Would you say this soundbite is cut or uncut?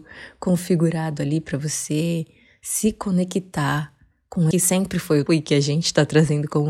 cut